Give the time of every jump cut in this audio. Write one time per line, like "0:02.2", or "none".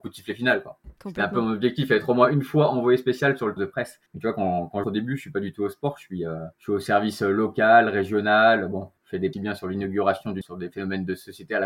0:01.0
0:03.6
0:04.1
0:04.8
0:06.5
0:09.0
0:09.3
0:10.4